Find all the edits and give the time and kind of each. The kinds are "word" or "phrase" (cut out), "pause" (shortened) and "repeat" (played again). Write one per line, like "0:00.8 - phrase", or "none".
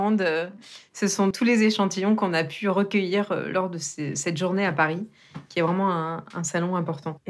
0:01.3 - word